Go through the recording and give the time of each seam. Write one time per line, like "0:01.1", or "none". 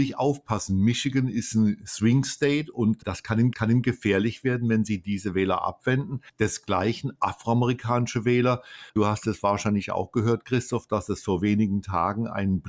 0:03.0
0:03.5
0:06.3
0:08.9